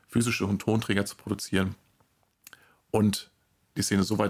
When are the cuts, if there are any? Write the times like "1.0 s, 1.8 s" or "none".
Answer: none